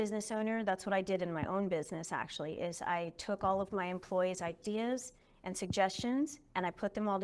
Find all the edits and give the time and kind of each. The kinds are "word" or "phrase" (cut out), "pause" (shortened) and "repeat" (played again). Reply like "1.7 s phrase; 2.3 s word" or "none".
none